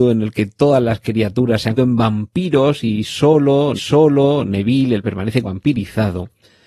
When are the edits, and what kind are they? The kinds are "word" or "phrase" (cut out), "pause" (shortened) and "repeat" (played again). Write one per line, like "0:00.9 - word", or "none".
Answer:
0:01.8 - word
0:03.7 - repeat
0:05.0 - word
0:05.4 - phrase